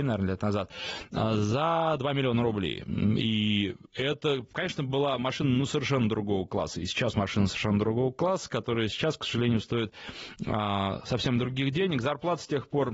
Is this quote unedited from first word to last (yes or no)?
yes